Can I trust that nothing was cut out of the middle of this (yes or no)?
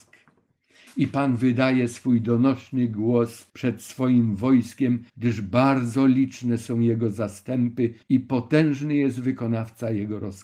no